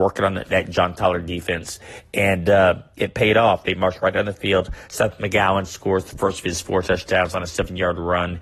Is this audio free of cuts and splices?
yes; 0 cuts

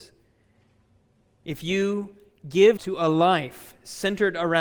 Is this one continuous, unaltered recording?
no; 1 cut; at 2.8 s

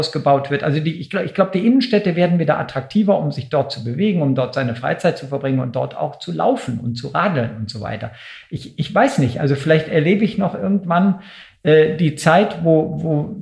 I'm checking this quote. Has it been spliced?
no; 0 cuts

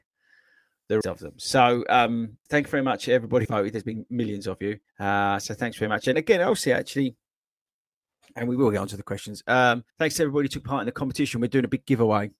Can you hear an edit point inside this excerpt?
yes; 6 cuts; at 1.0 s, 2.5 s, 3.5 s, 4.9 s, 6.1 s, 9.9 s

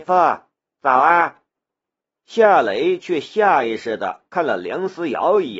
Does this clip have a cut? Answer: yes; 1 cut; at 1.5 s

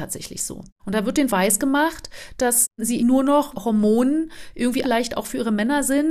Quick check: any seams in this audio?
yes; 4 cuts; at 1.3 s, 3.0 s, 3.5 s, 4.8 s

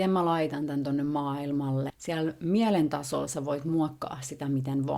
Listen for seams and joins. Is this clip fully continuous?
yes; 0 cuts

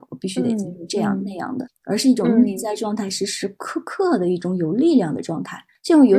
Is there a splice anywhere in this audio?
yes; 1 cut; at 1.7 s

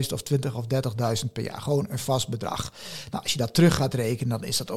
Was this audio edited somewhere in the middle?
no; 0 cuts

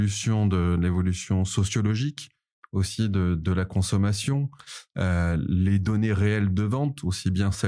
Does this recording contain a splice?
no; 0 cuts

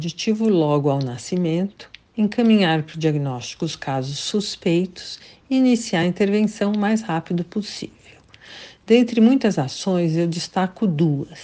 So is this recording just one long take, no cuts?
yes; 0 cuts

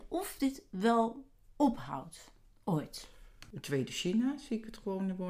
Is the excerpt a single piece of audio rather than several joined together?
yes; 0 cuts

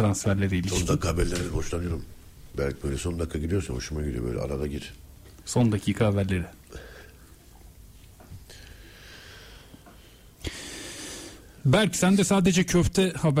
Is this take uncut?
yes; 0 cuts

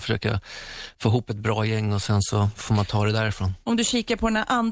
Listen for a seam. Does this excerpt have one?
no; 0 cuts

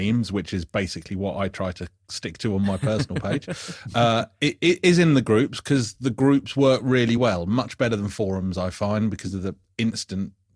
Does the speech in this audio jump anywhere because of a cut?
no; 0 cuts

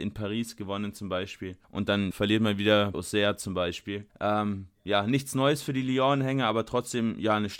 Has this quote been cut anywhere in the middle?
yes; 4 cuts; at 1.6 s, 2.1 s, 2.9 s, 4.1 s

